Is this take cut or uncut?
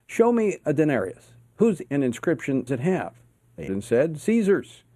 cut